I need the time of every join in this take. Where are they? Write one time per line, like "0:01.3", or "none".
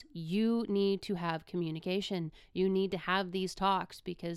none